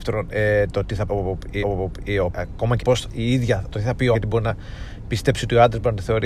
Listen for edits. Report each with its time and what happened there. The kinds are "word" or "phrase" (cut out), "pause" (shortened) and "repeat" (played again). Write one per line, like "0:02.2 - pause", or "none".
0:01.1 - word
0:01.6 - repeat
0:02.3 - phrase
0:02.8 - word
0:03.7 - word
0:04.1 - word

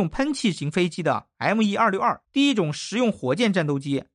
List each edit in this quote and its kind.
0:02.2 - pause

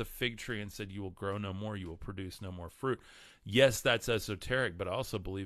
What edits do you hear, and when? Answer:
none

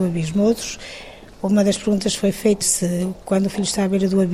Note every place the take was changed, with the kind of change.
0:02.6 - word

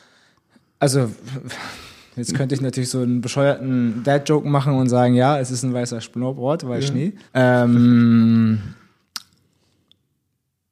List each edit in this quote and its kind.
0:07.3 - pause

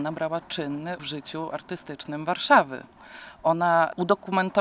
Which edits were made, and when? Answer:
0:01.0 - word

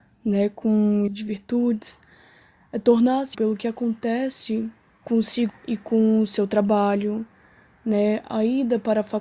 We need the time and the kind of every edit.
0:01.1 - phrase
0:03.3 - word
0:05.5 - word

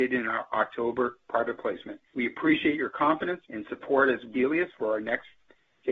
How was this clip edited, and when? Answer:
0:02.0 - pause
0:03.4 - pause
0:04.3 - phrase

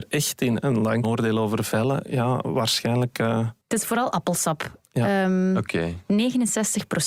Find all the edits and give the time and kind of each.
0:01.0 - phrase
0:03.6 - pause

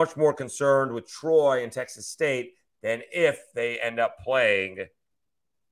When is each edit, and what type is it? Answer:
none

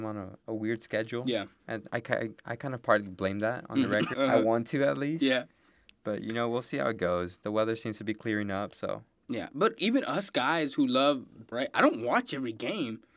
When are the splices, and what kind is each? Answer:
0:01.9 - word
0:04.1 - word
0:09.8 - word
0:11.5 - word

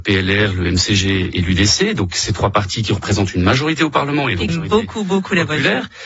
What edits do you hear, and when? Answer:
0:04.5 - phrase

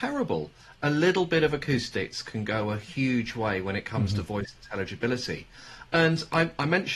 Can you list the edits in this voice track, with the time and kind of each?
none

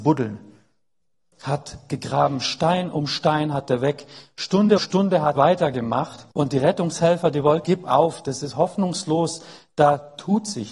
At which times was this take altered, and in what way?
0:04.8 - word
0:05.4 - word
0:06.3 - pause
0:07.6 - phrase

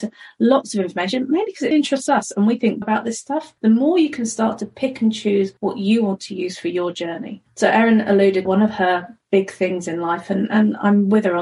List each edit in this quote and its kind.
0:01.7 - word
0:02.8 - phrase
0:03.6 - pause
0:05.6 - pause
0:07.5 - pause
0:08.4 - phrase

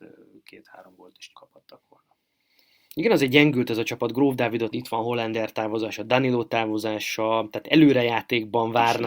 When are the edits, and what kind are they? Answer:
0:01.3 - word
0:04.7 - word

